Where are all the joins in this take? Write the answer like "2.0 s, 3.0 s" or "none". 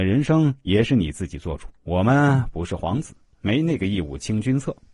1.7 s

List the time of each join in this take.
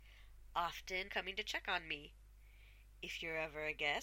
1.1 s

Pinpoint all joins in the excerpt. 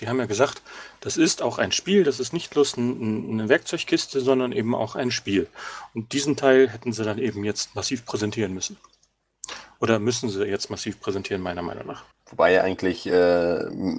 12.1 s

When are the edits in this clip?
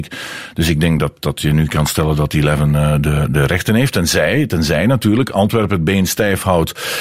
none

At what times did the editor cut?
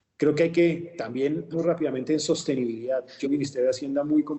1.5 s, 3.2 s

